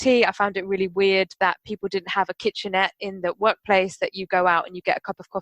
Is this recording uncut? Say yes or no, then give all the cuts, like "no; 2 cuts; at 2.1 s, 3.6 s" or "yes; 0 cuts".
yes; 0 cuts